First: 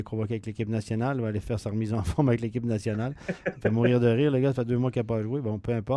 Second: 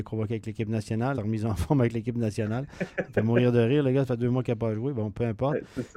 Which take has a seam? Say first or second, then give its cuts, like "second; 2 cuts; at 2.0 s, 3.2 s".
second; 1 cut; at 1.1 s